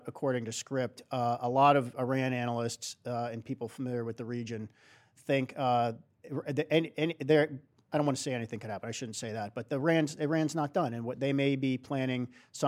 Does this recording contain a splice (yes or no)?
no